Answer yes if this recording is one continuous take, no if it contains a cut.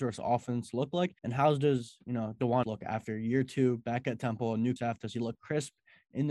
no